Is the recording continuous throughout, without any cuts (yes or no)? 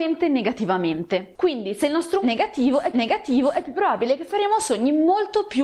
no